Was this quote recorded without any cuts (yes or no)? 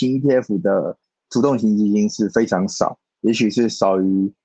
no